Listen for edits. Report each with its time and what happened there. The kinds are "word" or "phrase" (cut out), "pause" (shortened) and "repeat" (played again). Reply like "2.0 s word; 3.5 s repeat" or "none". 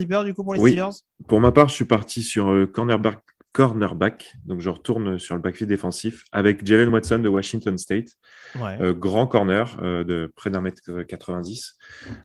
none

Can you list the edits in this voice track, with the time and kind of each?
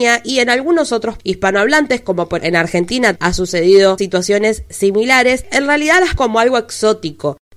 1.2 s word; 2.4 s word; 3.1 s word; 4.0 s word; 5.4 s word; 6.2 s word

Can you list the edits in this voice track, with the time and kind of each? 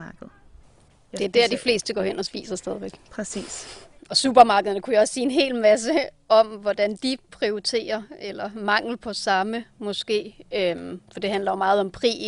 none

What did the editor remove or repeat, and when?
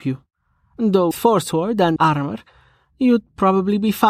1.1 s word; 2.0 s word

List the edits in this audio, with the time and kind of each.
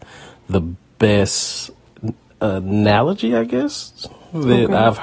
none

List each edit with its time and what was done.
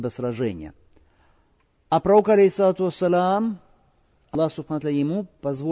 none

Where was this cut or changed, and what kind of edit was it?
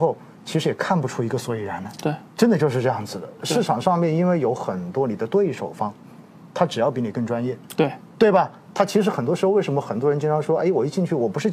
2.3 s pause; 6.5 s pause

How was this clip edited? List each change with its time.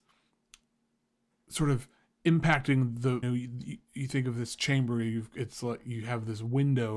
3.2 s word

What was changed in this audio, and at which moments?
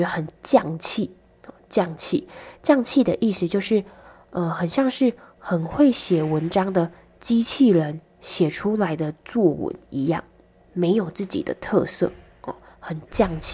none

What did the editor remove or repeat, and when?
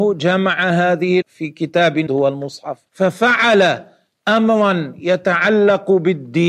1.2 s word; 2.1 s word; 2.9 s pause

